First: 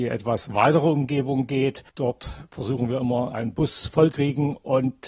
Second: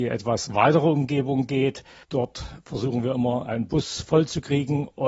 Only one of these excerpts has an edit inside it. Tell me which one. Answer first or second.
first